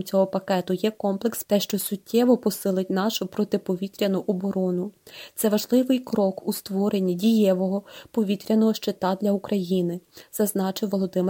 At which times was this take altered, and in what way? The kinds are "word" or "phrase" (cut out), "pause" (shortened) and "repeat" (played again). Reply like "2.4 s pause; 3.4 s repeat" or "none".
1.4 s word